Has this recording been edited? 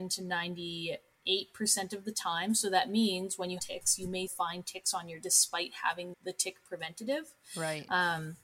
yes; 4 cuts; at 3.6 s, 4.3 s, 5.2 s, 6.1 s

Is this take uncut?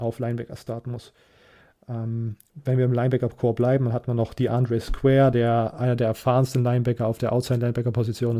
yes; 0 cuts

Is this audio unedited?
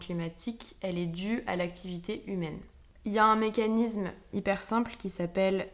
no; 1 cut; at 4.3 s

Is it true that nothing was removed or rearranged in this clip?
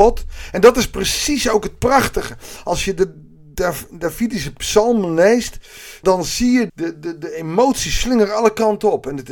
no; 2 cuts; at 6.0 s, 6.7 s

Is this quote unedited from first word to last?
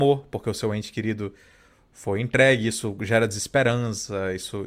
yes; 0 cuts

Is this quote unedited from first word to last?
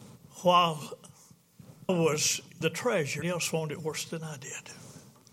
no; 3 cuts; at 1.9 s, 2.6 s, 3.2 s

